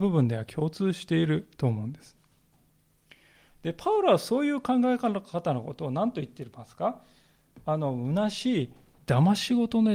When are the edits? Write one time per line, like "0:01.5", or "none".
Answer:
none